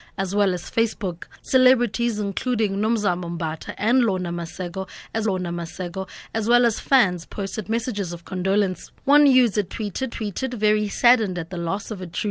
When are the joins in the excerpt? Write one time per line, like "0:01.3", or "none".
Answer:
0:05.2
0:10.1

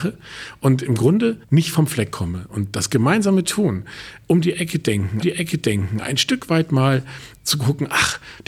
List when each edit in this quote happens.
0:01.4
0:05.2

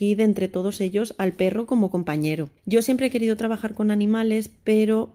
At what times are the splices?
0:02.6

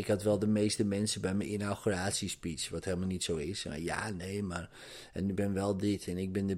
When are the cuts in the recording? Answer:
0:05.3

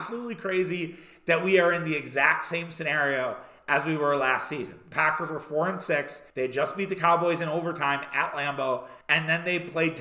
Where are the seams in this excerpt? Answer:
0:06.3
0:09.0

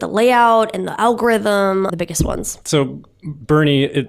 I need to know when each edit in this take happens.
0:01.9
0:02.6

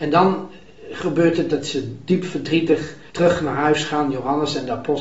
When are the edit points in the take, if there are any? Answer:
0:03.1

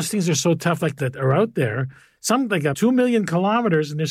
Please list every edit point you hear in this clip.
0:01.0
0:02.7

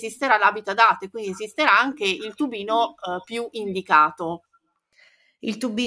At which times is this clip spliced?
none

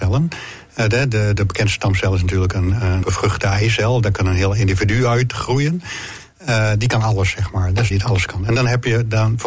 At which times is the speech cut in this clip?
0:01.4
0:03.0
0:07.9

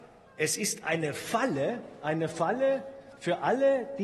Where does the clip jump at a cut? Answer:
none

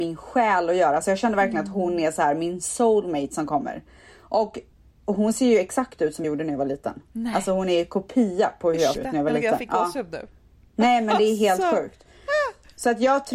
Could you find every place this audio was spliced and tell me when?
0:06.2
0:08.9

